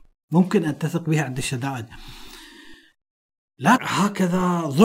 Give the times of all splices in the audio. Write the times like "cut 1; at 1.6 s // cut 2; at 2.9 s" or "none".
cut 1; at 3.8 s